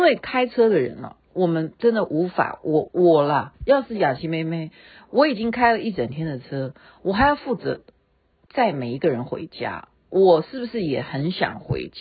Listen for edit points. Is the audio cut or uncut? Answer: cut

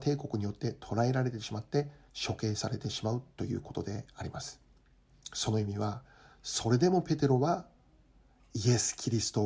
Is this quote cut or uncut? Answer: uncut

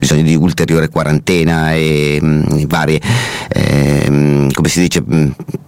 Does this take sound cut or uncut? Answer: uncut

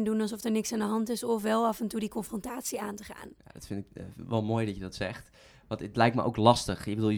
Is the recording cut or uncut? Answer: uncut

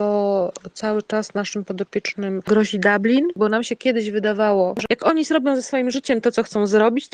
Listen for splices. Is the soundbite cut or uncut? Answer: uncut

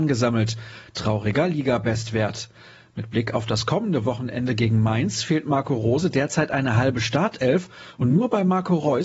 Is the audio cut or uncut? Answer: uncut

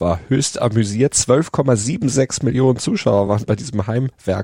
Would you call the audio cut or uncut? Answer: uncut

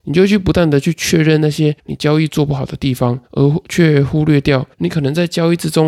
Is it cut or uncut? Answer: cut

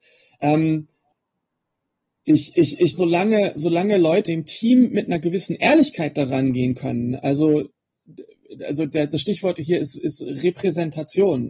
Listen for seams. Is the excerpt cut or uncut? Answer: cut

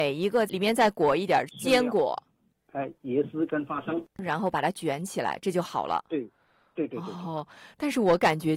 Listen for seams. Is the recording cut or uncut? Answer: cut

